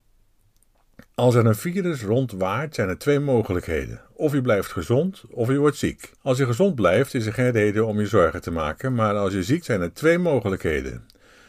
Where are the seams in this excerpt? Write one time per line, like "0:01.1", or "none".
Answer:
0:06.2
0:09.6